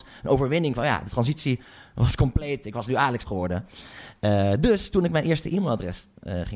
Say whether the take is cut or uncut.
cut